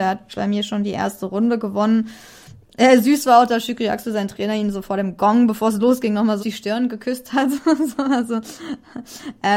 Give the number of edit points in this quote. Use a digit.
1